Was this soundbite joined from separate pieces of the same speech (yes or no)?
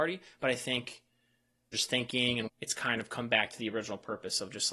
yes